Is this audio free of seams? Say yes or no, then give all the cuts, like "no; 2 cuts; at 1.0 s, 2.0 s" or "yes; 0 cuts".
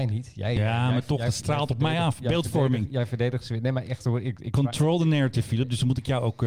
yes; 0 cuts